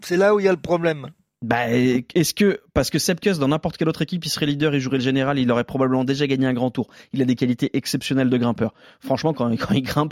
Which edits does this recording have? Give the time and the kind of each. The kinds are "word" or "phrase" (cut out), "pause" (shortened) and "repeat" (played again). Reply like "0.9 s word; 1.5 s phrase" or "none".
none